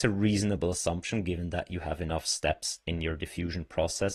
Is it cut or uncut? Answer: uncut